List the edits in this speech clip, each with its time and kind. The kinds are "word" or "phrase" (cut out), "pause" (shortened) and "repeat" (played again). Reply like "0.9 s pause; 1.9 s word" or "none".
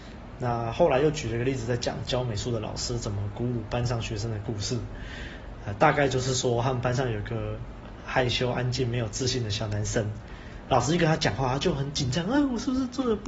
none